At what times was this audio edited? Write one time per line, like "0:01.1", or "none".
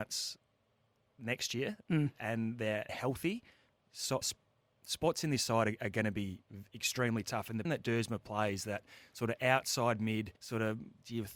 0:01.8
0:02.9
0:04.2
0:07.6
0:10.4